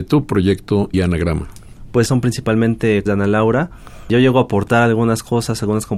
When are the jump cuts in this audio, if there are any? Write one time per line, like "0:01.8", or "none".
0:00.9
0:02.1
0:03.1